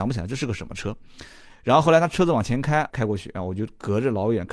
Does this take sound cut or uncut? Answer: cut